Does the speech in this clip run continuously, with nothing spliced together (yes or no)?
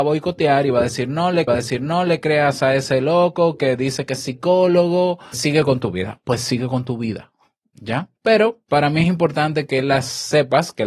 no